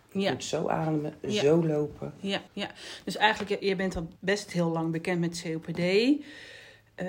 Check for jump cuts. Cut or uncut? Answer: cut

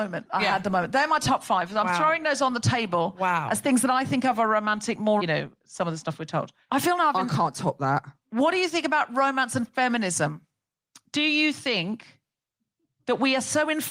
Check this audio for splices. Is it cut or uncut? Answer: cut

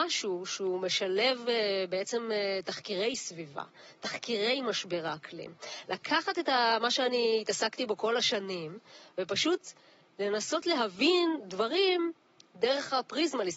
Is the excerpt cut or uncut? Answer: uncut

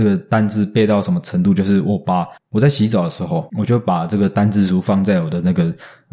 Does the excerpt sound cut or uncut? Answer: cut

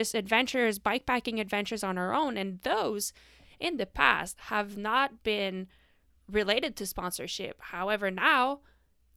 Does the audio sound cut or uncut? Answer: uncut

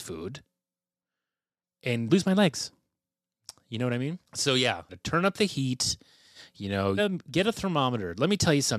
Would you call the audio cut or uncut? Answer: cut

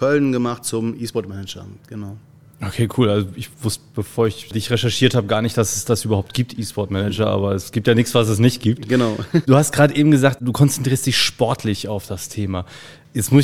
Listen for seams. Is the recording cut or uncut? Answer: uncut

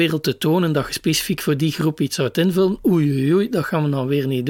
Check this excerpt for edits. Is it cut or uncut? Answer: uncut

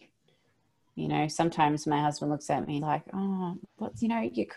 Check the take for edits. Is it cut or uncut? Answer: cut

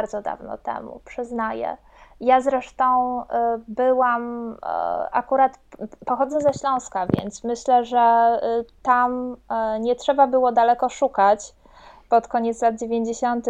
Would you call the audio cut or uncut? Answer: uncut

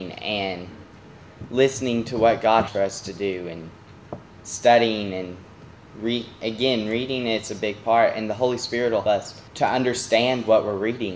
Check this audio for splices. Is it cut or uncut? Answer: cut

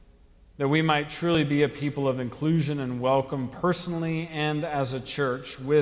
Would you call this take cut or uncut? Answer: uncut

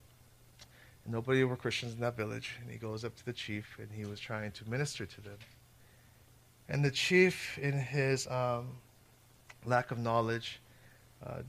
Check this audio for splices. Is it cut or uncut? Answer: uncut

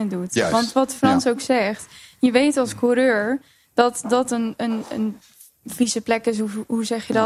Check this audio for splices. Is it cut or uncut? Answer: uncut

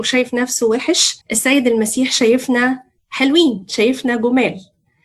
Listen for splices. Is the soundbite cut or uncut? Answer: cut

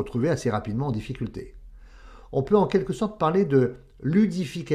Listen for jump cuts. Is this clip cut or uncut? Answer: uncut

